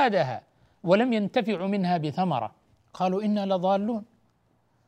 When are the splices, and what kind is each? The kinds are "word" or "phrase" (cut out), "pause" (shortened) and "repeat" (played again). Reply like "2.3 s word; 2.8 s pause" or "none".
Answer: 2.7 s pause